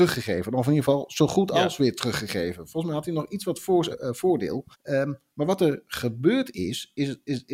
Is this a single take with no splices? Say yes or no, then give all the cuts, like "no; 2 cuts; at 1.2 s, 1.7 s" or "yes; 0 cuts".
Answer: no; 2 cuts; at 3.9 s, 4.7 s